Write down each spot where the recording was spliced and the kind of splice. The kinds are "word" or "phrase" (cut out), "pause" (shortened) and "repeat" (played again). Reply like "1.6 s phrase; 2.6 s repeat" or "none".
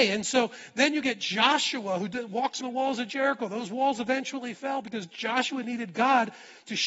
2.6 s word